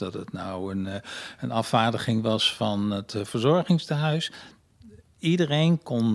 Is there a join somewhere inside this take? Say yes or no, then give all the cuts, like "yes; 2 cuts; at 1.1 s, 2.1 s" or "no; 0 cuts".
no; 0 cuts